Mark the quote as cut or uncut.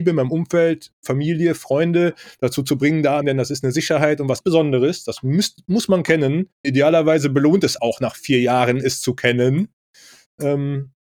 cut